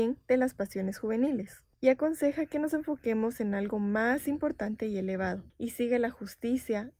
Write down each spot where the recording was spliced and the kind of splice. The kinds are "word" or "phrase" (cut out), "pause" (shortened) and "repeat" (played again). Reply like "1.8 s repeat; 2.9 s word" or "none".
1.7 s pause; 5.5 s pause

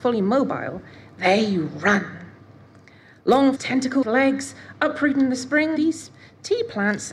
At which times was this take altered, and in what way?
3.6 s word; 4.0 s word; 5.8 s word

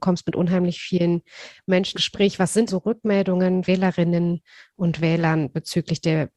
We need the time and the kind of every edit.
1.9 s word; 2.7 s word; 3.6 s word

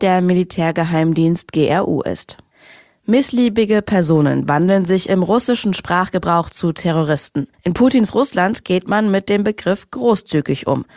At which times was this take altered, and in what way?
7.5 s pause

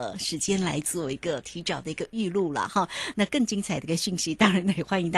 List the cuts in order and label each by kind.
none

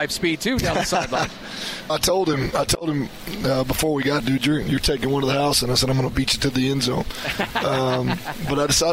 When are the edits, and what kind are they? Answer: 1.9 s word; 4.2 s phrase

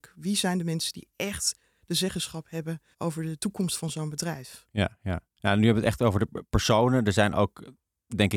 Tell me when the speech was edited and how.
2.9 s pause

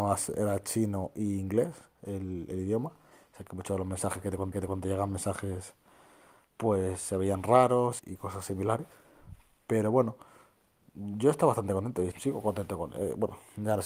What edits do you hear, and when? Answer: 3.1 s pause; 4.5 s repeat; 8.0 s word; 12.1 s word

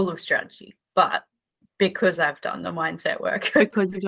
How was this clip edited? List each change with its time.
none

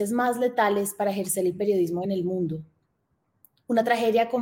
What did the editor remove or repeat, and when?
none

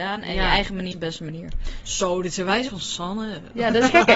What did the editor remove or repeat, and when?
0.9 s word; 2.7 s word

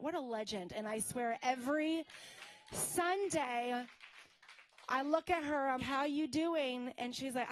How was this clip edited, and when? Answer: 5.8 s word

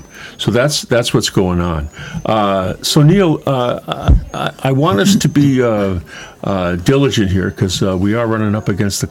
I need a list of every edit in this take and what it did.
none

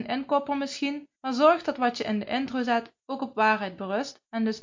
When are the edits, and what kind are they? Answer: 1.2 s pause

